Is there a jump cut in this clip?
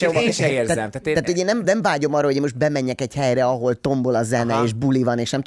no; 0 cuts

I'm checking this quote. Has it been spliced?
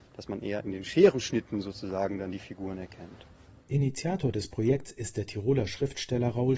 no; 0 cuts

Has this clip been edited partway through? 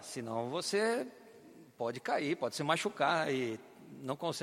no; 0 cuts

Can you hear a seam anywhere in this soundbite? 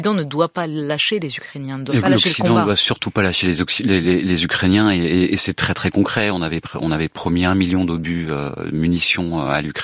no; 0 cuts

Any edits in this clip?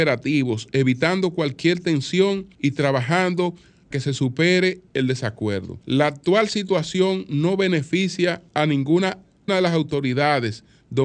yes; 6 cuts; at 2.5 s, 3.9 s, 4.9 s, 5.8 s, 8.5 s, 9.5 s

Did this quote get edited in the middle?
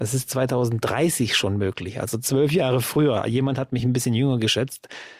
no; 0 cuts

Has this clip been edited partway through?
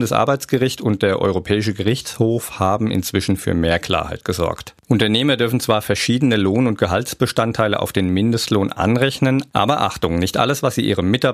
no; 0 cuts

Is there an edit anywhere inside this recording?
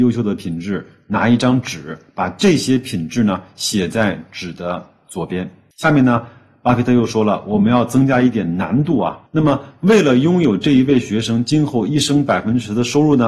yes; 1 cut; at 9.3 s

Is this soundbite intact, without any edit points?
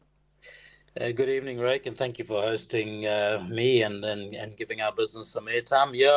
yes; 0 cuts

